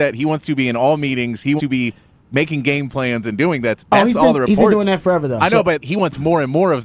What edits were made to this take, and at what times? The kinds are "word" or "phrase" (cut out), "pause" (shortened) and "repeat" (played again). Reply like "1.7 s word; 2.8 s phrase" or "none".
1.6 s word; 5.8 s word

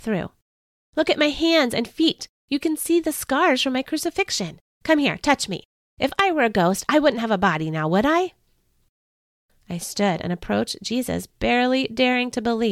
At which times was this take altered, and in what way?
none

